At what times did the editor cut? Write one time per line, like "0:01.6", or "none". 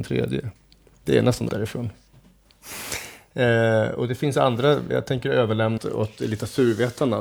0:01.5
0:04.9
0:05.8

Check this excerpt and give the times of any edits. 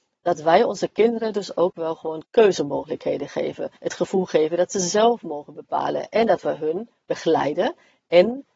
0:03.8

